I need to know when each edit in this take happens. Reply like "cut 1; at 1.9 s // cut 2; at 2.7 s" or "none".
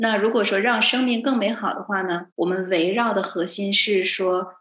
cut 1; at 2.3 s